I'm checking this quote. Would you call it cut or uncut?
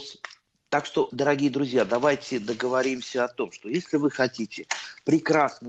cut